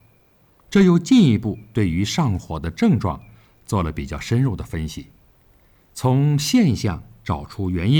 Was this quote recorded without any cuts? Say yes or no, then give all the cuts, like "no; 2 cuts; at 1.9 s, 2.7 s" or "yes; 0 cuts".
yes; 0 cuts